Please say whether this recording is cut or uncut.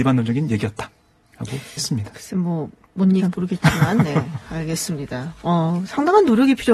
cut